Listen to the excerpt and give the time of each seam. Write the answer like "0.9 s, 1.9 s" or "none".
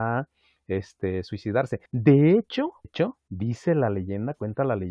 1.9 s, 2.8 s